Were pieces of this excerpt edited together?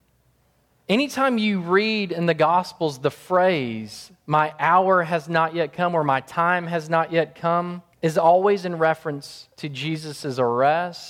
yes; 1 cut; at 7.9 s

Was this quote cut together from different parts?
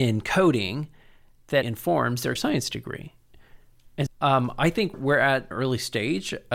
yes; 5 cuts; at 1.6 s, 2.4 s, 4.1 s, 4.9 s, 5.5 s

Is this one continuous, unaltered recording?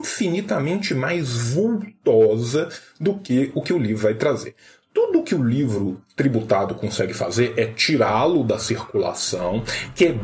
yes; 0 cuts

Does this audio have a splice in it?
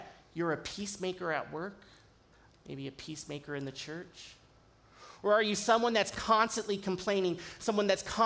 yes; 1 cut; at 2.5 s

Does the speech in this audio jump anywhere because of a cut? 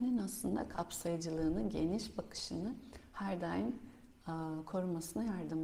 no; 0 cuts

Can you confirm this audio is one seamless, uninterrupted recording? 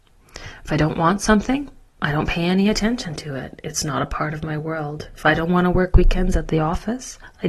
yes; 0 cuts

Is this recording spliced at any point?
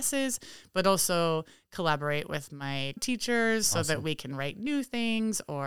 yes; 1 cut; at 3.0 s

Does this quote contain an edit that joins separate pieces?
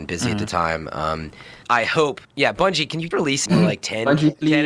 yes; 4 cuts; at 1.6 s, 2.2 s, 3.1 s, 3.5 s

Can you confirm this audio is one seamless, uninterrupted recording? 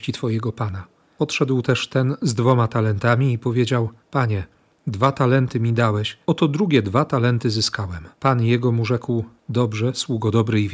no; 4 cuts; at 1.0 s, 4.0 s, 6.2 s, 8.1 s

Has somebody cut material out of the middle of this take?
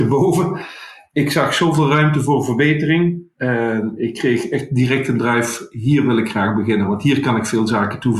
no; 0 cuts

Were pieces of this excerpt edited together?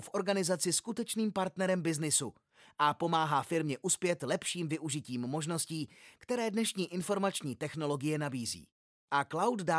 no; 0 cuts

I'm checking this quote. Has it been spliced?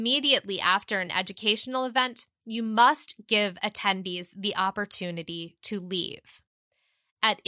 no; 0 cuts

